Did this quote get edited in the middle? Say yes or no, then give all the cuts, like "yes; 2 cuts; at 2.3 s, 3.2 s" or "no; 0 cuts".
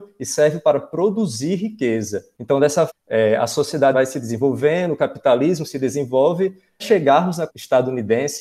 yes; 4 cuts; at 2.9 s, 3.9 s, 6.8 s, 7.5 s